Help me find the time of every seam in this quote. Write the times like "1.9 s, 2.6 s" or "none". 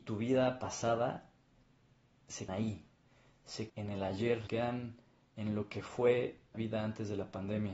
2.5 s, 3.7 s, 4.5 s, 6.5 s